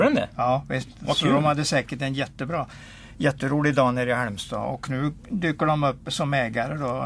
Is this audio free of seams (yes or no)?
yes